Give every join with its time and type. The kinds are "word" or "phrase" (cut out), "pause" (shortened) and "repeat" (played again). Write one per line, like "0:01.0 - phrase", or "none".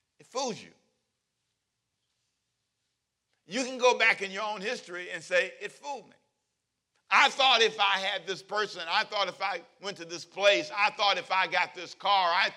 none